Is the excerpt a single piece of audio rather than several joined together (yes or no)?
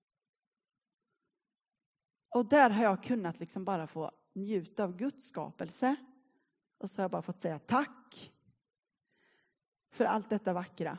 yes